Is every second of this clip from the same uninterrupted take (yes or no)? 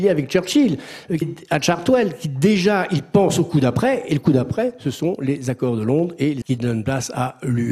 no